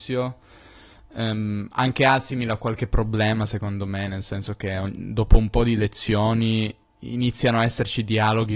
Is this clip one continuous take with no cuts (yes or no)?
no